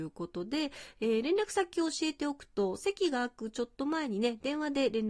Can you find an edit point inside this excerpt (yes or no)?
no